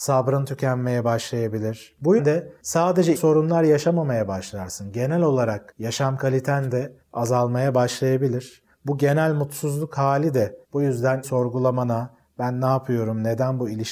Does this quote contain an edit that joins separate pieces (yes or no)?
yes